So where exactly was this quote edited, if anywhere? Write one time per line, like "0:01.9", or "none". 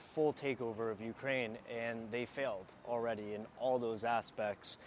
none